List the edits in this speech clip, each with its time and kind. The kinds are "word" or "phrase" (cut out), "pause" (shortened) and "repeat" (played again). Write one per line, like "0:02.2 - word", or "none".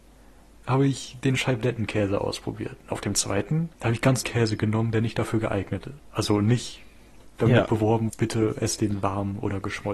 0:03.7 - pause
0:04.2 - word
0:06.0 - pause
0:08.1 - word